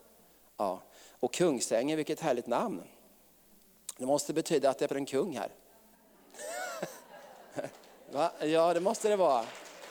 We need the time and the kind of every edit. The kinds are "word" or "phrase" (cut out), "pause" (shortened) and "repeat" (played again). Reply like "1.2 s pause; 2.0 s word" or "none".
4.9 s word